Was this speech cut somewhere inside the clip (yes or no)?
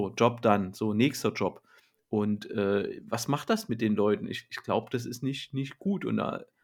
no